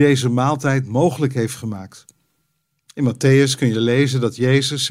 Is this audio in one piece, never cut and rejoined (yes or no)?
yes